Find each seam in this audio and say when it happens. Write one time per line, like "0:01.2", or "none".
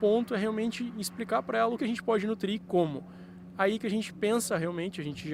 0:01.8